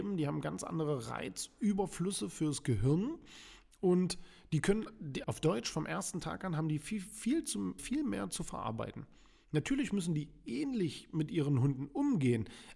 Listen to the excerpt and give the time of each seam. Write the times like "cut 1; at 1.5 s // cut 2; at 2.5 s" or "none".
cut 1; at 5.2 s // cut 2; at 7.8 s